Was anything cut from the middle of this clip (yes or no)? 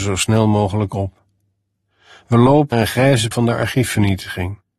yes